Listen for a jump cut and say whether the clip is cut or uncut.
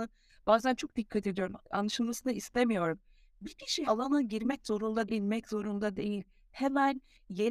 cut